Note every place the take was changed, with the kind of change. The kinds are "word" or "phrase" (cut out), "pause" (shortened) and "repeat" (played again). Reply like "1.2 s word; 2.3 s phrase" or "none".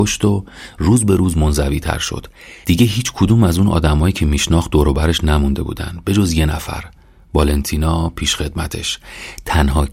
none